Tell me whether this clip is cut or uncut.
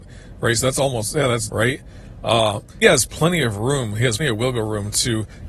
cut